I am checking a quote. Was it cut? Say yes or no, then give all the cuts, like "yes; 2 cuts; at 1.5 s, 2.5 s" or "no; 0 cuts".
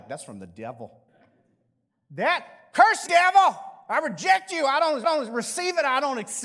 yes; 3 cuts; at 1.1 s, 3.1 s, 5.0 s